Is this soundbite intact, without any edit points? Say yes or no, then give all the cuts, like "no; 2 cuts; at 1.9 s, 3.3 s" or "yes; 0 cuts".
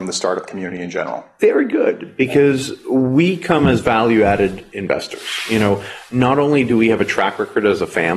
yes; 0 cuts